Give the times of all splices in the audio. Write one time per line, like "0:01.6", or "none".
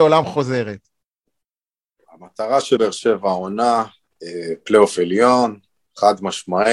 0:02.8